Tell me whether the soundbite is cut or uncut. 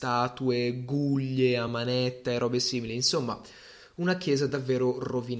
uncut